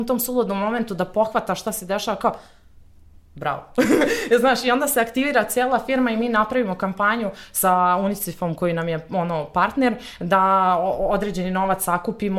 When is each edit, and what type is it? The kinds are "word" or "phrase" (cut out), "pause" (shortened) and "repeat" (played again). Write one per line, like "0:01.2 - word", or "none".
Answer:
none